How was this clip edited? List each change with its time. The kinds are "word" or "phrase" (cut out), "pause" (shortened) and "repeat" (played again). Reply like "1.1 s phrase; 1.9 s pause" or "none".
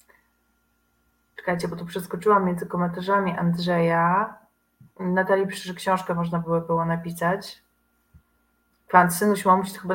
none